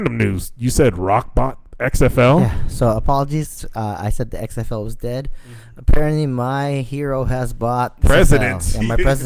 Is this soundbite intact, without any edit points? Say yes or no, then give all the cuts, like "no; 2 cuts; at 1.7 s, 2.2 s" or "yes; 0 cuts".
no; 1 cut; at 8.0 s